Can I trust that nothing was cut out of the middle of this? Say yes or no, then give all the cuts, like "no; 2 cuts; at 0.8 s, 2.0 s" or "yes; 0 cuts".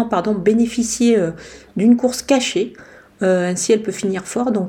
yes; 0 cuts